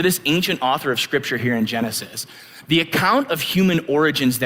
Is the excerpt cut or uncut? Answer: uncut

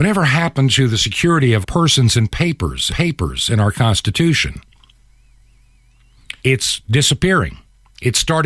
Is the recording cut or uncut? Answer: cut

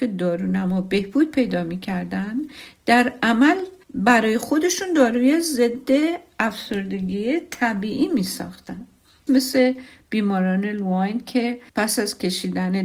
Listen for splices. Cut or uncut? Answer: cut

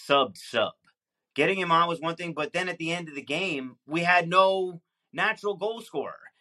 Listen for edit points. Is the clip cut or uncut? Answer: uncut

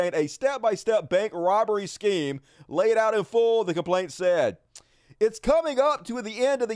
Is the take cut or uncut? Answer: uncut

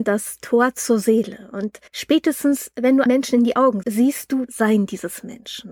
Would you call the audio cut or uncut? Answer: cut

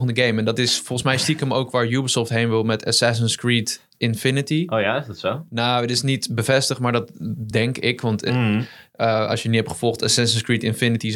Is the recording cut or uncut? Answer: uncut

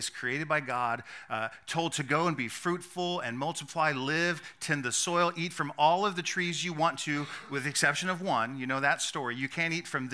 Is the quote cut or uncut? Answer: uncut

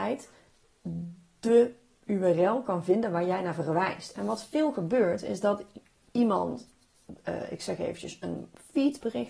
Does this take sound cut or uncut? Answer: uncut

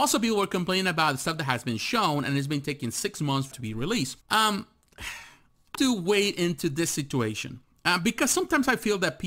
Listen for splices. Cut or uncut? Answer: cut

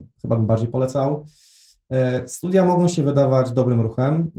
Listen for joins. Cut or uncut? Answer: uncut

